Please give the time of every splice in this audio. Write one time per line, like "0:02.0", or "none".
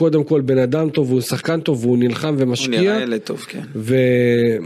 none